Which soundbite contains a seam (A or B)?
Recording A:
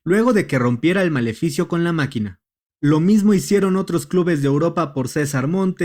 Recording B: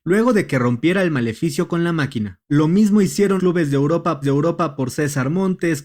B